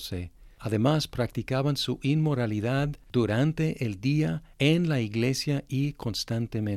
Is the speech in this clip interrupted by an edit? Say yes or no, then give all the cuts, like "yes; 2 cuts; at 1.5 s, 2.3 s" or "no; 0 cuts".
no; 0 cuts